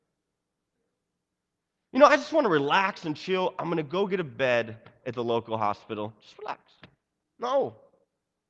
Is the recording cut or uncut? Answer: uncut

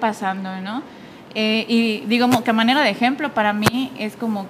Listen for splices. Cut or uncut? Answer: uncut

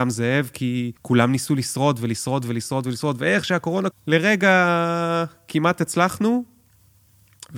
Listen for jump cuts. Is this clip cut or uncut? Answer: cut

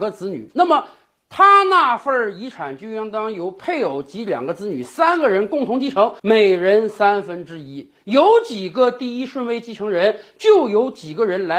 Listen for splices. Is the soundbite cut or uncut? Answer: cut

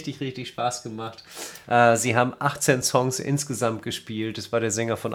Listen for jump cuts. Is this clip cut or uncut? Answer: uncut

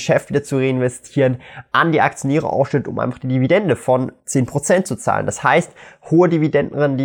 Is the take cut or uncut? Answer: cut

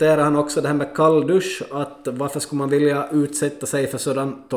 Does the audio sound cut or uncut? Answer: uncut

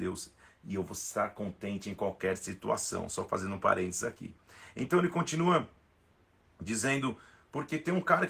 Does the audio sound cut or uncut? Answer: uncut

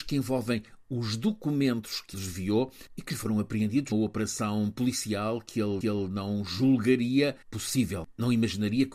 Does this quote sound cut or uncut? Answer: cut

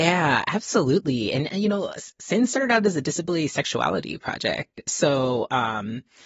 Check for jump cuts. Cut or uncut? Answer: uncut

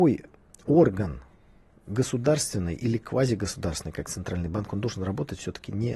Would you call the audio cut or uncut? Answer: uncut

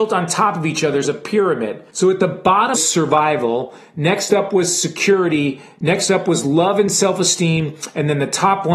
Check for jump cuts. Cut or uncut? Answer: cut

